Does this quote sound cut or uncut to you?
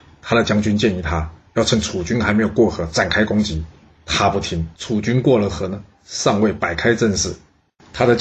cut